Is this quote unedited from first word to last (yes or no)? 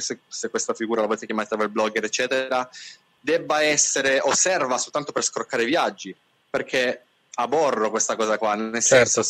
yes